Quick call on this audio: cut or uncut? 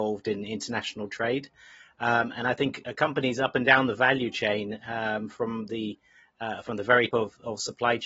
cut